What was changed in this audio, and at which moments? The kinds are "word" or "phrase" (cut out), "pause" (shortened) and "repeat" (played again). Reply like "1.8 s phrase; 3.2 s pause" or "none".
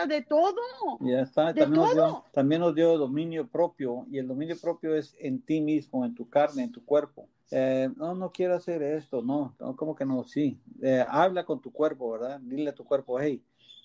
2.3 s pause; 7.4 s pause